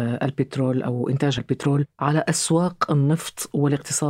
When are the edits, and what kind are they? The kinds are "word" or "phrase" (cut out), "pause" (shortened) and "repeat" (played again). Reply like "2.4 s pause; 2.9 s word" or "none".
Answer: 1.4 s word